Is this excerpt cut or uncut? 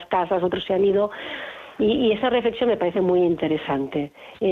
uncut